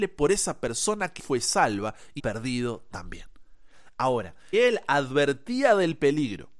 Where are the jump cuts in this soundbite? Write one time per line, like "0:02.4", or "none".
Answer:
0:01.2
0:02.2
0:04.5